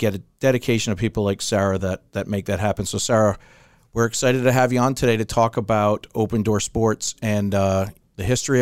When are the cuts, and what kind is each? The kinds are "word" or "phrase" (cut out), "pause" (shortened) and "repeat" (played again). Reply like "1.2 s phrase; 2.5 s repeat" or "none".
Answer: none

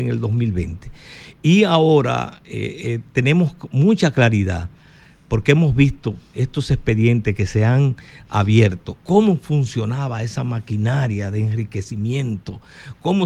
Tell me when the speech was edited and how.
none

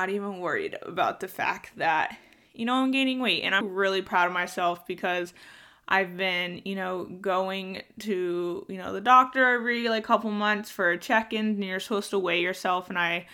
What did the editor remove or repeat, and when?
3.6 s word

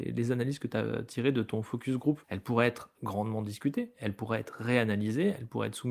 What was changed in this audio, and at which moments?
2.2 s pause

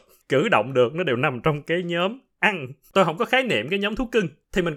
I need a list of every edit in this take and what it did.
2.9 s word

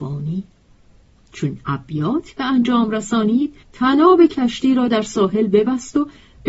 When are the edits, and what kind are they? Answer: 3.6 s pause

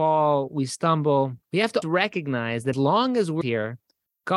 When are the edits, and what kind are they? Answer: 1.4 s pause; 1.8 s word; 2.7 s word; 3.4 s word

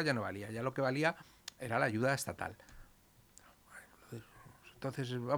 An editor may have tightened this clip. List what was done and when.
none

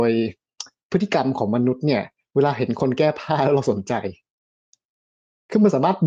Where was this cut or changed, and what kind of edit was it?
none

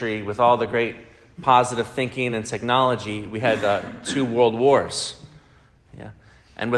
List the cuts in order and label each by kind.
none

